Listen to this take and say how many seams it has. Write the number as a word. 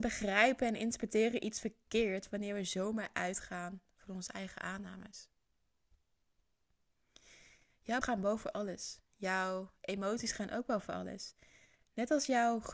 one